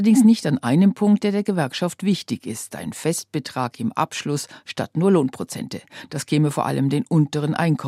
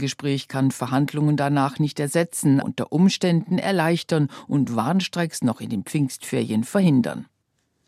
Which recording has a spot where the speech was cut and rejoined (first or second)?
second